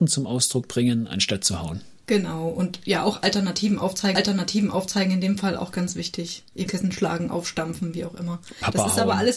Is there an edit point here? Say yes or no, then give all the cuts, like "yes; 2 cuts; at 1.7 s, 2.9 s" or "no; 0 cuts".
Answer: yes; 3 cuts; at 2.0 s, 4.1 s, 6.7 s